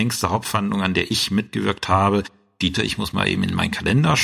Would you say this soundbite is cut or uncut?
cut